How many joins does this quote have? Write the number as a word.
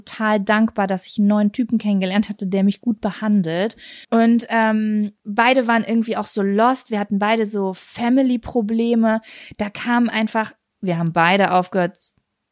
two